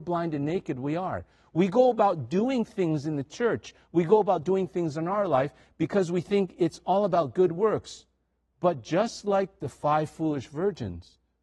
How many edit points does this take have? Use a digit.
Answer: 0